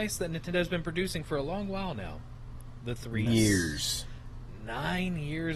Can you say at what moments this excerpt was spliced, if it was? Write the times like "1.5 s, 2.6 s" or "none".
3.3 s